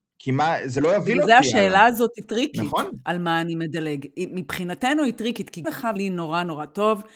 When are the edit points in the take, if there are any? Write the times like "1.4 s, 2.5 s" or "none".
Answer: 5.6 s, 6.0 s